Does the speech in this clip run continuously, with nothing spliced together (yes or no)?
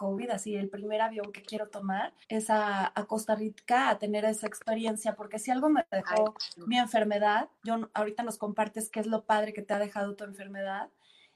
no